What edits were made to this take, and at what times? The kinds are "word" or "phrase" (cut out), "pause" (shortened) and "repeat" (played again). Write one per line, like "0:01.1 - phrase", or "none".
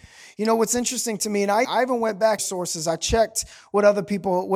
0:01.6 - word
0:02.4 - phrase